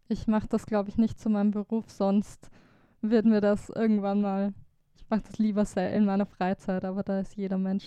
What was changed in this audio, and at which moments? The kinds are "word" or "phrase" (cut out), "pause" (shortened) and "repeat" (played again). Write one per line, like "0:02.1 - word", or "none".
none